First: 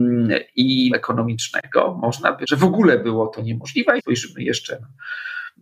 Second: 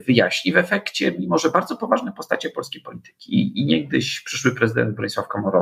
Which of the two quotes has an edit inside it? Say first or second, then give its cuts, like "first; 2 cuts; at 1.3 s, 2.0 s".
first; 3 cuts; at 0.9 s, 2.4 s, 4.0 s